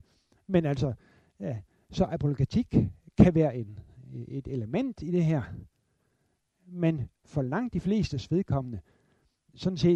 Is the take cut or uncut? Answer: uncut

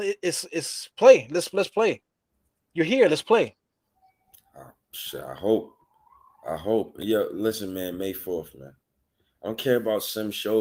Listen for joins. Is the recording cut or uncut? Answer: uncut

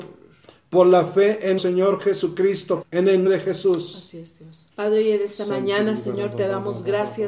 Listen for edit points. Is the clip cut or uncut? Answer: cut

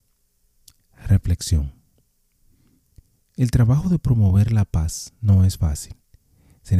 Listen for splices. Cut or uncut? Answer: uncut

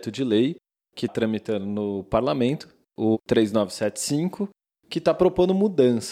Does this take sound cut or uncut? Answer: cut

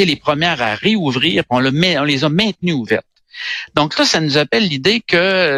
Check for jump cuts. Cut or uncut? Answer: uncut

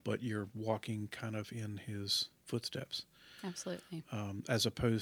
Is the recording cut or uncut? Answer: uncut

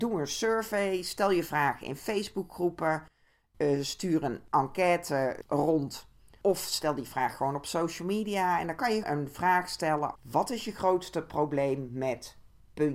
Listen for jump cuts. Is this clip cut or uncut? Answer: cut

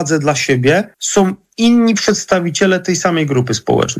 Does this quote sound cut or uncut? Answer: cut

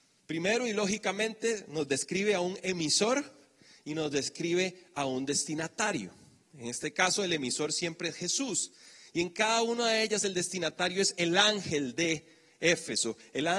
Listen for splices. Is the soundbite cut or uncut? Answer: uncut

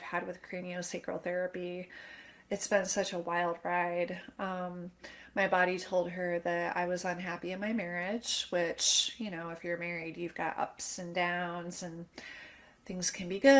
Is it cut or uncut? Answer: uncut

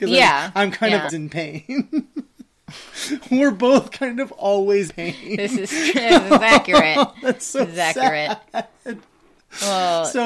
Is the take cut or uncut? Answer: cut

